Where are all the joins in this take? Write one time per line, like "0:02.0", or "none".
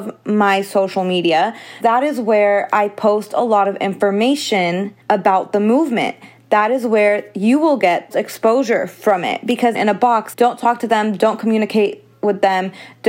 0:01.8
0:05.0
0:07.8
0:08.1
0:09.7
0:10.3